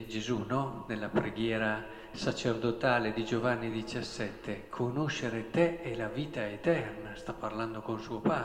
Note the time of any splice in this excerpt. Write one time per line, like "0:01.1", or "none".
none